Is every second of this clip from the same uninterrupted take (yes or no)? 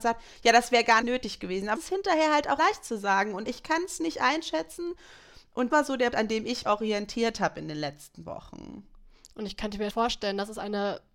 no